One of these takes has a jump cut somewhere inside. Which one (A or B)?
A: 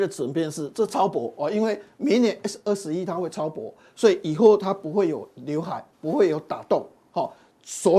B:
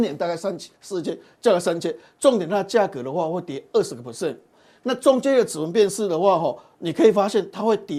A